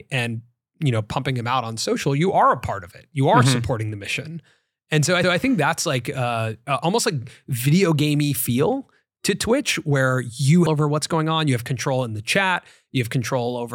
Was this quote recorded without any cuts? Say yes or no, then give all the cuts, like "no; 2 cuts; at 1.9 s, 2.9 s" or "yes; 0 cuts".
no; 2 cuts; at 5.2 s, 10.7 s